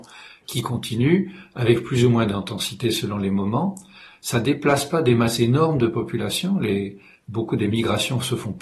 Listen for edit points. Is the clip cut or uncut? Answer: uncut